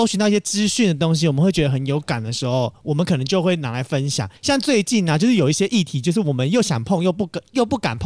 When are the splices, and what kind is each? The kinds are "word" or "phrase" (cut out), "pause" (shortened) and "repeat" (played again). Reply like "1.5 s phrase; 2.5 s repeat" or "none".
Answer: 4.4 s pause